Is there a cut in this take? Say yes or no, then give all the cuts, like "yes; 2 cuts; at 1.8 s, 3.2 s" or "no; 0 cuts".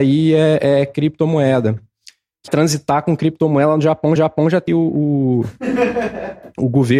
yes; 3 cuts; at 2.5 s, 4.2 s, 4.7 s